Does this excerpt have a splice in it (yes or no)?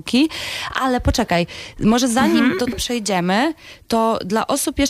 yes